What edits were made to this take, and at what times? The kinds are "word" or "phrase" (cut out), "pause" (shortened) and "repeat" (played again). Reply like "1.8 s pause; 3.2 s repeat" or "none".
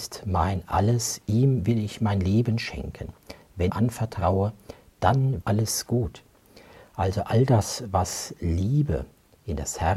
3.7 s phrase; 5.4 s word